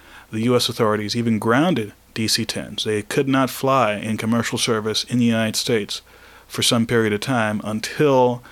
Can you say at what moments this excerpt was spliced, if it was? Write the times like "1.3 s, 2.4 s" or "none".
none

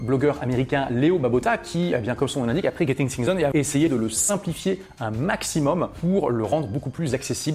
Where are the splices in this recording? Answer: 3.5 s

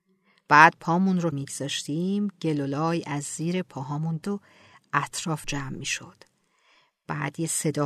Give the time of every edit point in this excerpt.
1.3 s, 4.2 s, 5.4 s

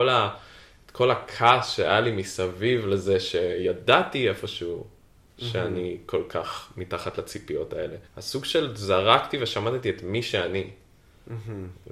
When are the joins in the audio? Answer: 8.1 s

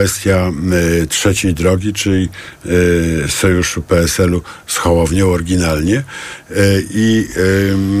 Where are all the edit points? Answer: none

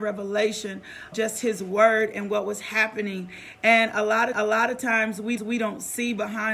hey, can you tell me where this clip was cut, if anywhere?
1.1 s, 4.3 s, 5.4 s

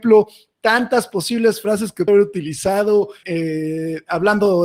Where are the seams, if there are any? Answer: 2.1 s, 3.2 s

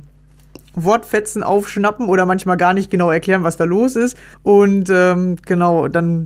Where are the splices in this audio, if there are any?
4.3 s

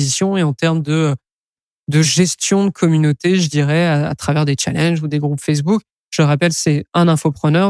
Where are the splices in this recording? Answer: none

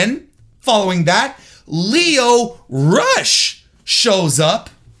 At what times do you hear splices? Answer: none

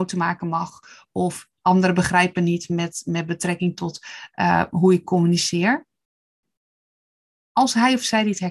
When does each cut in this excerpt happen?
none

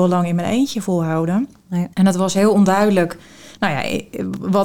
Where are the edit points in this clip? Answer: 1.9 s

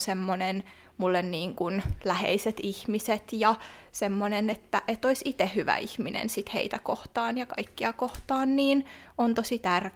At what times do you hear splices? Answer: none

